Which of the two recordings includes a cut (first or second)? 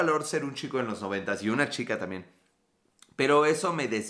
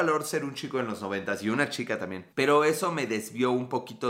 second